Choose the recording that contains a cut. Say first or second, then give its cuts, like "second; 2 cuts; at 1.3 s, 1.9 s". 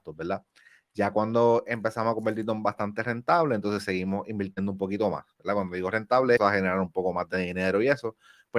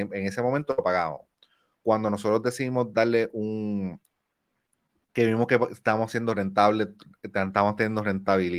first; 1 cut; at 6.4 s